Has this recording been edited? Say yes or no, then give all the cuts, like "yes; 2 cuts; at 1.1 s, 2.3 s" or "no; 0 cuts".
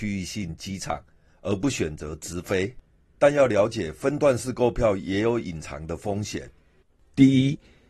no; 0 cuts